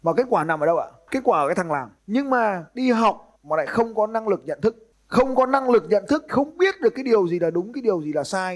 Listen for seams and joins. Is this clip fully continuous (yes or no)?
no